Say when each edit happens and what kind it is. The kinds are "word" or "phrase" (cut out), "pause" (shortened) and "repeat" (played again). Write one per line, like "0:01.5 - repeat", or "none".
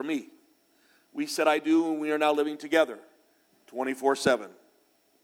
none